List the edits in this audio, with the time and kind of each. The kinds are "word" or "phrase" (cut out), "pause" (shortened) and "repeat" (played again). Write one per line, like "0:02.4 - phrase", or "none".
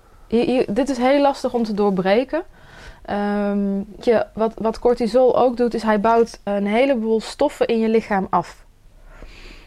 0:04.0 - word
0:06.5 - word